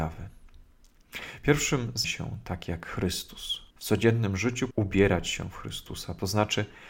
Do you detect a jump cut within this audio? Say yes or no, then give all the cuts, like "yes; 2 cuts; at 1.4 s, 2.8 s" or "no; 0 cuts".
yes; 3 cuts; at 2.0 s, 3.7 s, 4.7 s